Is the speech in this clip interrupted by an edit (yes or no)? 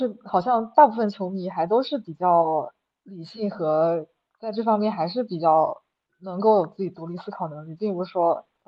no